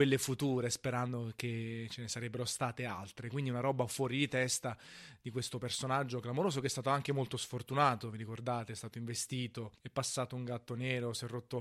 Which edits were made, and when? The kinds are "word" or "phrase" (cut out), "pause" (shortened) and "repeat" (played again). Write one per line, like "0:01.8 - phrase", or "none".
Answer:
0:09.8 - pause